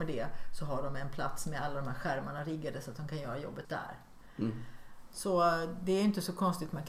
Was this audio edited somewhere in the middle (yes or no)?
yes